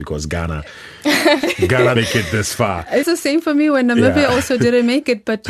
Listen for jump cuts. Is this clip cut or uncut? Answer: cut